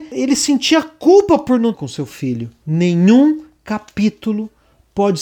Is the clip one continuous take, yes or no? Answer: no